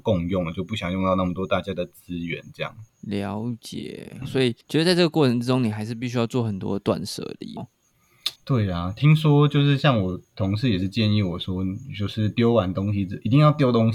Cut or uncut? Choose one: cut